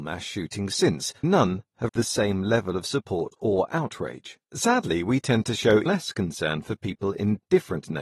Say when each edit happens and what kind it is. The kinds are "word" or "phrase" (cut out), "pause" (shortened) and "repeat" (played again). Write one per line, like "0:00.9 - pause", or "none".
0:01.2 - word
0:01.9 - word
0:04.4 - pause
0:05.9 - word